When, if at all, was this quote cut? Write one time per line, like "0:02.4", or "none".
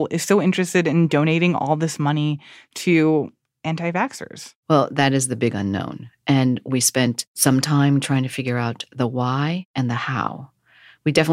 none